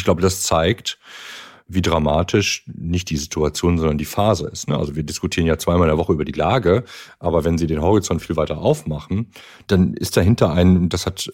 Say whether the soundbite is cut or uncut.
uncut